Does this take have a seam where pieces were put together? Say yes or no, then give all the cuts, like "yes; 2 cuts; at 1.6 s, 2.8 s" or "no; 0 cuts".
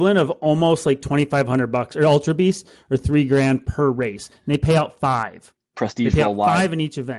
no; 0 cuts